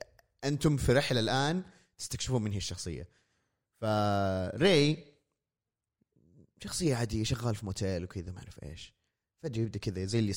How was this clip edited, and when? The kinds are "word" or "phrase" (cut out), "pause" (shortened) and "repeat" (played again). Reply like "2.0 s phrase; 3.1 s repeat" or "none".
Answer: none